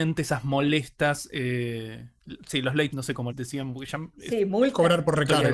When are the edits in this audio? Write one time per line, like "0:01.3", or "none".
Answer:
0:02.9
0:03.3